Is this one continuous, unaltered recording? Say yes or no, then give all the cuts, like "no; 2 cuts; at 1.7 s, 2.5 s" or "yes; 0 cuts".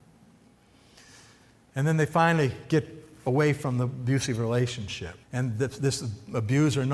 no; 1 cut; at 5.2 s